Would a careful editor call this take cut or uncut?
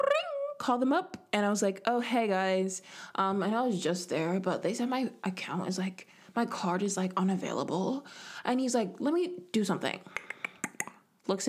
uncut